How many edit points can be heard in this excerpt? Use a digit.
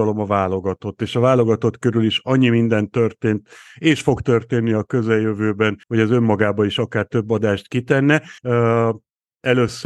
2